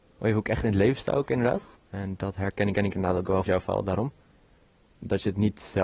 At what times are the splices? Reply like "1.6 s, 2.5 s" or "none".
1.8 s, 2.8 s, 3.5 s